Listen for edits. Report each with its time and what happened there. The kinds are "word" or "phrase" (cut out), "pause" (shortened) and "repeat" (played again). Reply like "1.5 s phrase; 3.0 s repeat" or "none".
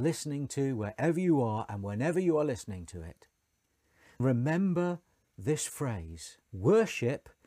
4.2 s word; 6.4 s pause